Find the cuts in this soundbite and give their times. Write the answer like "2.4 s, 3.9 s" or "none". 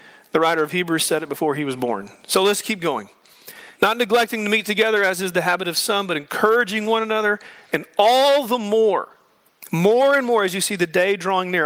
3.7 s